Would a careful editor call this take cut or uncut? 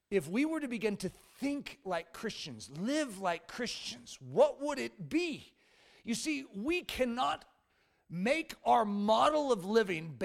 uncut